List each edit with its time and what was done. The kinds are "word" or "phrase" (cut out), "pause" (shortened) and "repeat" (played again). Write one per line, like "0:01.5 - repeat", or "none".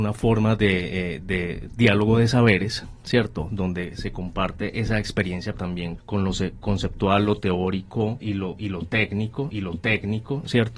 0:05.5 - word
0:06.0 - word
0:08.2 - word
0:09.5 - repeat